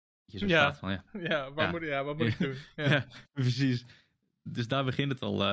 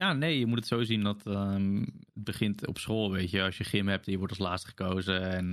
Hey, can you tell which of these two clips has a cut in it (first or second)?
second